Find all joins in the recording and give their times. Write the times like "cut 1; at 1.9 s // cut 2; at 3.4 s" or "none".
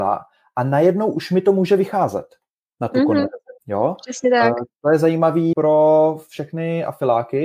cut 1; at 3.6 s // cut 2; at 5.5 s